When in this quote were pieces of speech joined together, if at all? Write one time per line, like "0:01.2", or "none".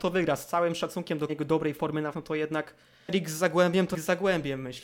0:01.3
0:02.1
0:03.1
0:03.9

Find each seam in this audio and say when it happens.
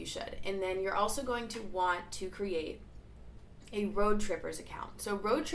none

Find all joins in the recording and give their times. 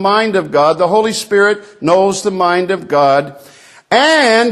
none

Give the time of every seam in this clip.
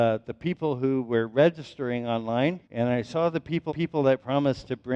0:02.6
0:03.7

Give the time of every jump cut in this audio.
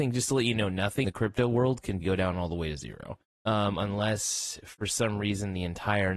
0:01.0
0:02.0
0:03.3

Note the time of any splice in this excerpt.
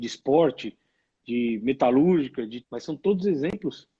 0:02.6

